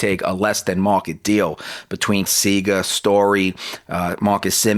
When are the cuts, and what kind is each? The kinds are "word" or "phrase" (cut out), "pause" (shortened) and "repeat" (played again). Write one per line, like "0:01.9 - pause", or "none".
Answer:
0:02.3 - word

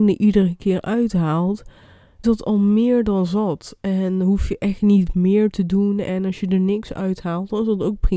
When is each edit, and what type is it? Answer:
0:02.2 - word

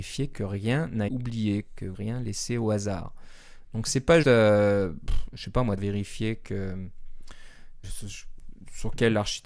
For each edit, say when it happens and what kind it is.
0:01.1 - word
0:01.9 - word
0:04.2 - word
0:05.8 - word
0:07.8 - word

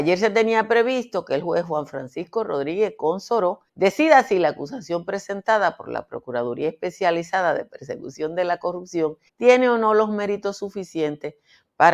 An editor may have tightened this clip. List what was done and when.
0:03.7 - pause
0:09.3 - pause

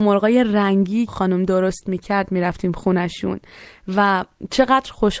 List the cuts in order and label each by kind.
0:01.1 - phrase

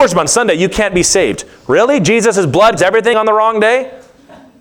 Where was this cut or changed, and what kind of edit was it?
0:02.8 - word
0:03.1 - phrase

